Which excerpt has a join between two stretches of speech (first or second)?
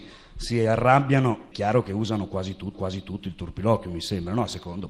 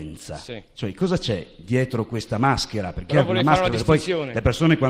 first